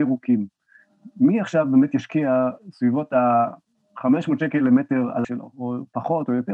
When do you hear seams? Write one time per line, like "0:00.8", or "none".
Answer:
0:05.2